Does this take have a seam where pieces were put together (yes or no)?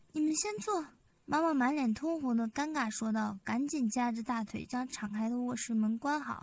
yes